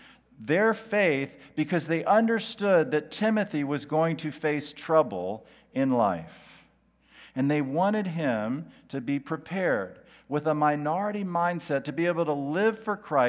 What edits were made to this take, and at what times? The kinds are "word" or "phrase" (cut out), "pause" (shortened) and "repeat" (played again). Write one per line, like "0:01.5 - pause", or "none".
none